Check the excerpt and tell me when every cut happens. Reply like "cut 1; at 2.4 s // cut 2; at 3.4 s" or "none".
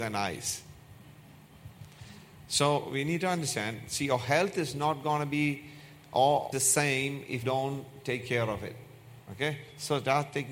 cut 1; at 2.9 s // cut 2; at 6.5 s // cut 3; at 7.4 s